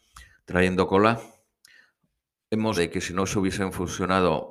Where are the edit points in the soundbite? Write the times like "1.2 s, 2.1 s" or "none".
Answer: 2.7 s